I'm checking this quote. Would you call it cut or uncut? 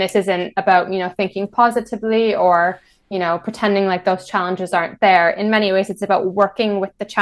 uncut